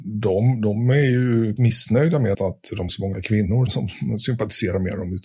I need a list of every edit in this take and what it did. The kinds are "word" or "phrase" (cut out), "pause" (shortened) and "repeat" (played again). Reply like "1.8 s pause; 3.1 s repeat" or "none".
1.6 s word; 2.3 s word; 2.9 s word; 3.7 s word